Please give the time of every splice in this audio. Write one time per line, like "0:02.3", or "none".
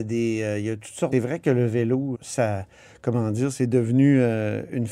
0:01.1
0:02.1